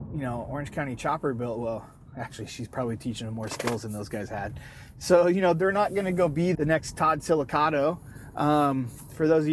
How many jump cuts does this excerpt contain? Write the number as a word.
one